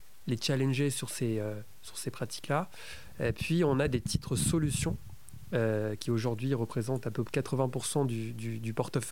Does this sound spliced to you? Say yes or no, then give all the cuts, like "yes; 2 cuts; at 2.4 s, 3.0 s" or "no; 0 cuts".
yes; 1 cut; at 7.3 s